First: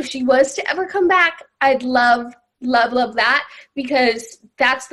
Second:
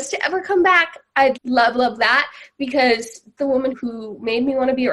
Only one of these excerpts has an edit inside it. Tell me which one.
second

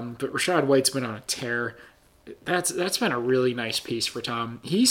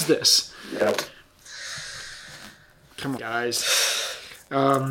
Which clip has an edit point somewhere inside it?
second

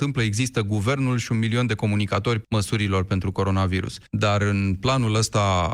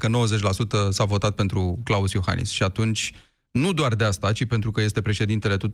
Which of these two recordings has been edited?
first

